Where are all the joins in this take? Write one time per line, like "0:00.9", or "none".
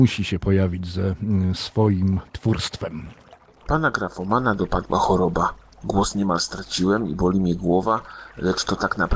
none